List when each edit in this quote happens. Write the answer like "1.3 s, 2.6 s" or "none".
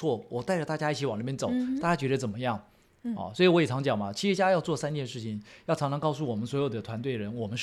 none